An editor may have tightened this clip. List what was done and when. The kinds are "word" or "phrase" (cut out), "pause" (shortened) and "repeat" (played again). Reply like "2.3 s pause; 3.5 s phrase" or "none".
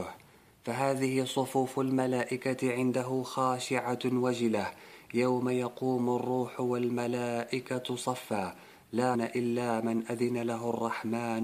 9.1 s word